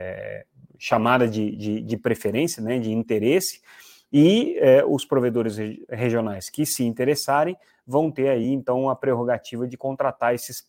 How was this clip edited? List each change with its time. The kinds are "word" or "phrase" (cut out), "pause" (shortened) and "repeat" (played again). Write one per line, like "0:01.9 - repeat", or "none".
none